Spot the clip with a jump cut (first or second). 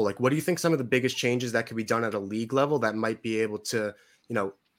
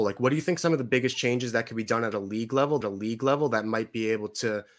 second